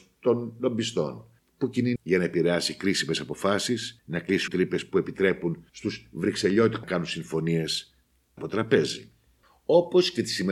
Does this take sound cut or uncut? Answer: cut